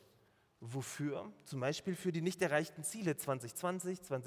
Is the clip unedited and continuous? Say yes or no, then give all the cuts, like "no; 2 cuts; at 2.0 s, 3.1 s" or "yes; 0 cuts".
yes; 0 cuts